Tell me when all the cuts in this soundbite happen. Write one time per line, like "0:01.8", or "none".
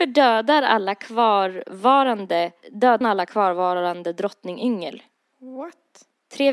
0:03.0